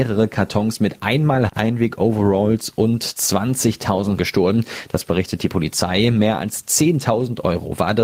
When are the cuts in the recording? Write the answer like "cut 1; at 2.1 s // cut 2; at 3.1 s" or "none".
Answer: cut 1; at 1.5 s // cut 2; at 4.2 s